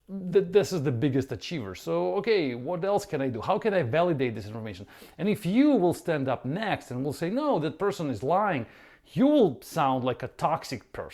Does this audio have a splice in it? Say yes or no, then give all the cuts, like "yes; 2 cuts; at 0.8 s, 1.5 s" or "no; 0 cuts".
no; 0 cuts